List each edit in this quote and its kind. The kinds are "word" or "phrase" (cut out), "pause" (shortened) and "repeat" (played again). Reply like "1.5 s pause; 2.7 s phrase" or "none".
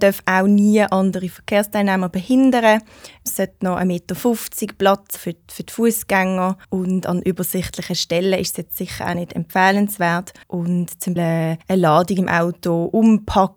5.2 s word; 6.6 s pause; 10.4 s pause; 11.2 s word; 11.6 s pause